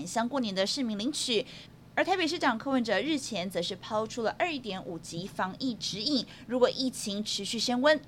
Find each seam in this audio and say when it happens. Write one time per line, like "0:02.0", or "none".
none